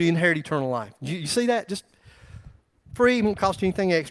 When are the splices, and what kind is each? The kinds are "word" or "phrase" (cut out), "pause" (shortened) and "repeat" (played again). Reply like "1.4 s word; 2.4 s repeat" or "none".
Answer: none